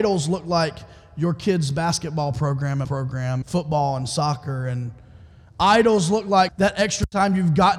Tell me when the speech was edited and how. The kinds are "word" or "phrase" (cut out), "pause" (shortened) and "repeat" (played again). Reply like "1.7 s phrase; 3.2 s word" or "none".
2.8 s word; 3.4 s word; 6.5 s word